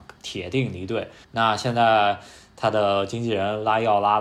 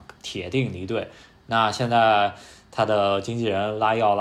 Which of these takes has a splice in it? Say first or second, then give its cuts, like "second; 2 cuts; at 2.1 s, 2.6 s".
first; 1 cut; at 1.2 s